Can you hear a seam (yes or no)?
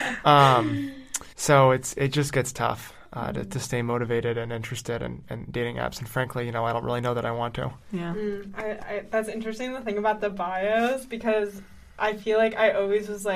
yes